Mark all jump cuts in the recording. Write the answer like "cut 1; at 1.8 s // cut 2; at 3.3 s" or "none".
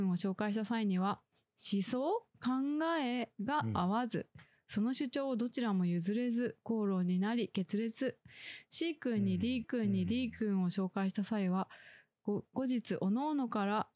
cut 1; at 9.6 s